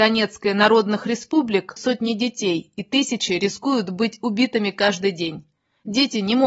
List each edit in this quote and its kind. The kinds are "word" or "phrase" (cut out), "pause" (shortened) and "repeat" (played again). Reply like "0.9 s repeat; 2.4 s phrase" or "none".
1.8 s phrase